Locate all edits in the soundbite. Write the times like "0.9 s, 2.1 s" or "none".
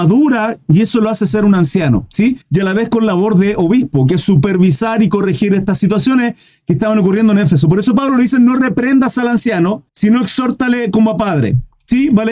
2.4 s, 9.9 s